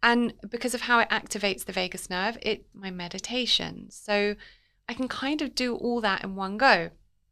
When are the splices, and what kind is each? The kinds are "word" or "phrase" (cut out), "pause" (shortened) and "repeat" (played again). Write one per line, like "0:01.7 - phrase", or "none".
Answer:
0:02.7 - word